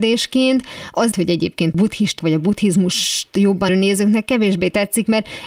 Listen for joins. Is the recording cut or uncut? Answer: cut